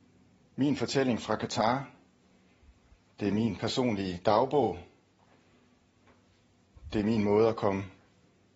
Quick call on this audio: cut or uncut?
uncut